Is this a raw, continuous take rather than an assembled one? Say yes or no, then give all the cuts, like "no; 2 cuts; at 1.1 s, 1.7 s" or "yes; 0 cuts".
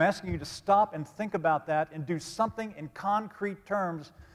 yes; 0 cuts